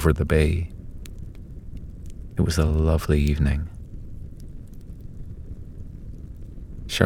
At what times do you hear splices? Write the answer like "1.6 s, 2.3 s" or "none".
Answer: none